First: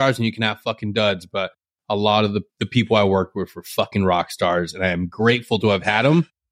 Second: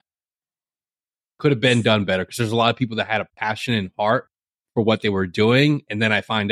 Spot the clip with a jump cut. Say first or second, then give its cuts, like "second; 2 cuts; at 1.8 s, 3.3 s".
first; 1 cut; at 2.5 s